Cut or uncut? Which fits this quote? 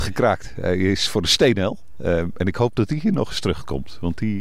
uncut